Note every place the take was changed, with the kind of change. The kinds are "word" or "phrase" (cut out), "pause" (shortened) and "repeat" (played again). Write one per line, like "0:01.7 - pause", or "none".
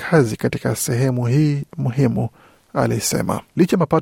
none